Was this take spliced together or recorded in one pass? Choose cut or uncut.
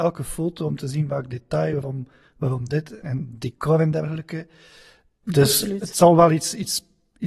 uncut